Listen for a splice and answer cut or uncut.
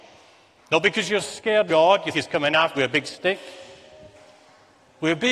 cut